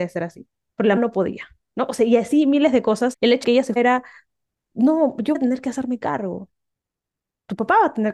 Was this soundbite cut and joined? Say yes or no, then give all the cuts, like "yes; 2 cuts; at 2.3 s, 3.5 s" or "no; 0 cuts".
yes; 5 cuts; at 1.0 s, 3.1 s, 3.4 s, 3.8 s, 5.3 s